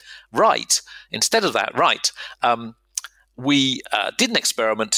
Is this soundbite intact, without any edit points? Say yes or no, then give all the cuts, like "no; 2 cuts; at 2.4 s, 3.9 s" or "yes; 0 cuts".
yes; 0 cuts